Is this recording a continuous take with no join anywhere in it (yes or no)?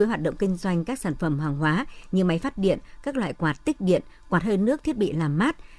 yes